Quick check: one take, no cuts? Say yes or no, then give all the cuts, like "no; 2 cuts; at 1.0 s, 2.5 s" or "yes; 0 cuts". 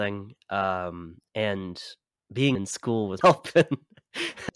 no; 2 cuts; at 2.5 s, 3.2 s